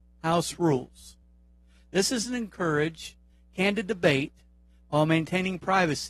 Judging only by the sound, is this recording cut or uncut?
uncut